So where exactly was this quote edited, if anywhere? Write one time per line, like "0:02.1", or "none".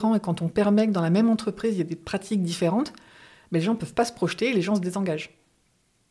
none